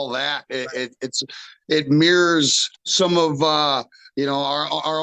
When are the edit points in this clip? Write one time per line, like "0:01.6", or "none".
0:02.7